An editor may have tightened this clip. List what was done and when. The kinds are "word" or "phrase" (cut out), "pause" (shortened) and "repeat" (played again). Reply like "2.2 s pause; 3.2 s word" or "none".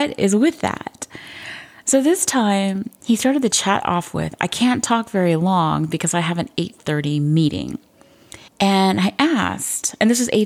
8.5 s pause